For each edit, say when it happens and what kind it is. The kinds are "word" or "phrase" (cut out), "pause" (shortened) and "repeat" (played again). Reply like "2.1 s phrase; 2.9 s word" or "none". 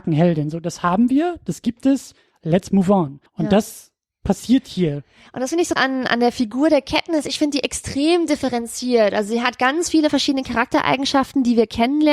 3.3 s pause; 5.8 s word

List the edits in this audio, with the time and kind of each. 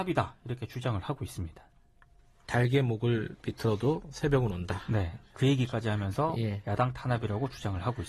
none

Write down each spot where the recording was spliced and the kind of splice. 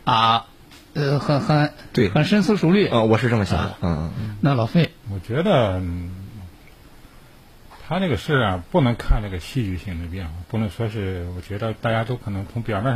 5.0 s word

